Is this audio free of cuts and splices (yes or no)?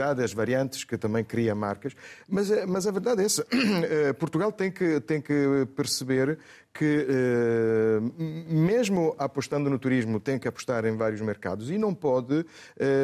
yes